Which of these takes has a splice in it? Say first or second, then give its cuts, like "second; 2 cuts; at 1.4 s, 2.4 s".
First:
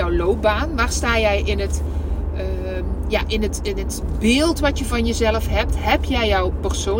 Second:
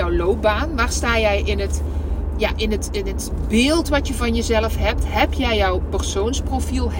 second; 1 cut; at 2.3 s